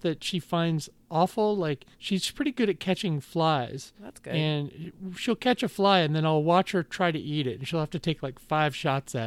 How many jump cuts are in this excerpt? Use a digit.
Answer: 2